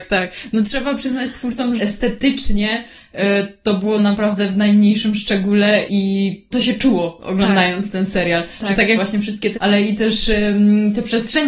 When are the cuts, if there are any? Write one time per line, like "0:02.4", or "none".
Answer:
0:01.8
0:04.0
0:05.9
0:06.5
0:09.0
0:09.5